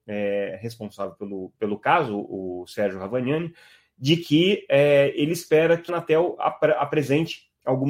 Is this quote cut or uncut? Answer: cut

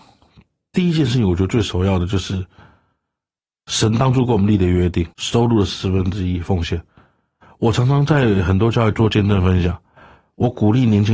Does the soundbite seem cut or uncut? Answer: cut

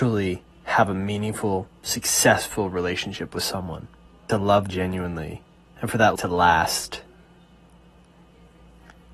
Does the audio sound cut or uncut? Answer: cut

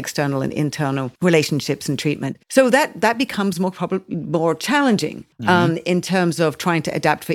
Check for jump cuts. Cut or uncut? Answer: cut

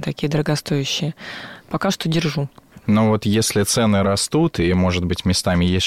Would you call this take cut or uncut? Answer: uncut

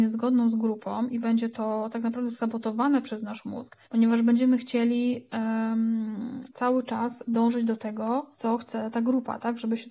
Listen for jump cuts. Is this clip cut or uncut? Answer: cut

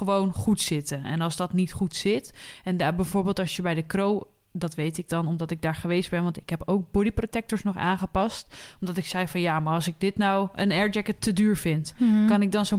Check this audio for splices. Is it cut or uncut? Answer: uncut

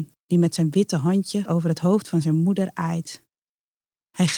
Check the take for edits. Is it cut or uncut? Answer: cut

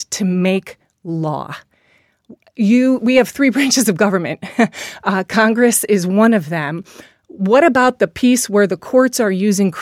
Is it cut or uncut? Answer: uncut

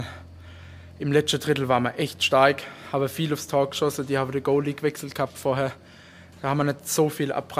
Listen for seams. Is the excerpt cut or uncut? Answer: uncut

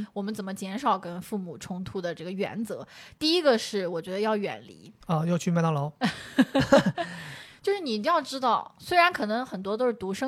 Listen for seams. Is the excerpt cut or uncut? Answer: cut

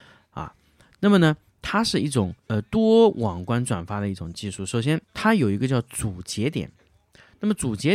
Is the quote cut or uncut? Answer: cut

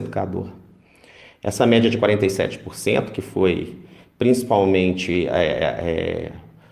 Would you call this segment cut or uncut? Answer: uncut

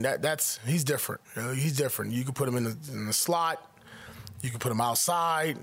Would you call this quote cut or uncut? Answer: cut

